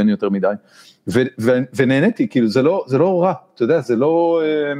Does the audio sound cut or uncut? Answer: uncut